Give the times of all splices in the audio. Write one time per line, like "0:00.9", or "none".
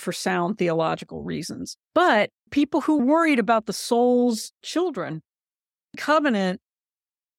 0:02.5
0:03.0
0:04.6
0:05.9